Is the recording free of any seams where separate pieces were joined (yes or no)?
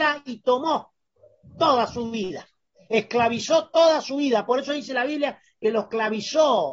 yes